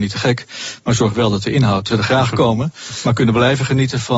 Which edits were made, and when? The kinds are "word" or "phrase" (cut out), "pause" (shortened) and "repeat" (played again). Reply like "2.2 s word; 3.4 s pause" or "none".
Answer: 1.9 s phrase